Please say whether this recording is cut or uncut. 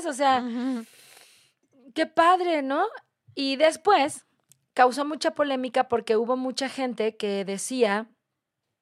uncut